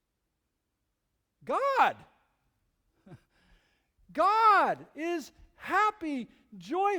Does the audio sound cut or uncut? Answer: uncut